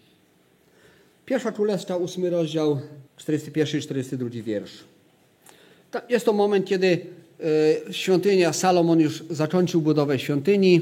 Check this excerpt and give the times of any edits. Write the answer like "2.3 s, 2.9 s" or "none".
3.1 s